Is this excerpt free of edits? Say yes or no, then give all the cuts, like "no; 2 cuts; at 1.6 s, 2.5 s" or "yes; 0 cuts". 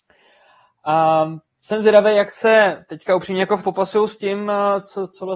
no; 1 cut; at 3.6 s